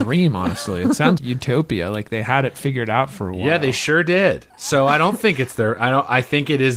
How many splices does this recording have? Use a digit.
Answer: 2